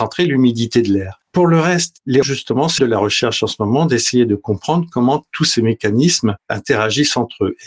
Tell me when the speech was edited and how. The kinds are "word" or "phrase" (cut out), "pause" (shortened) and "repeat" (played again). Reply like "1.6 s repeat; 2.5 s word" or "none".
1.3 s pause; 2.2 s word; 2.8 s phrase